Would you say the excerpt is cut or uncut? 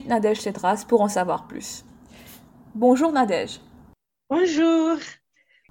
uncut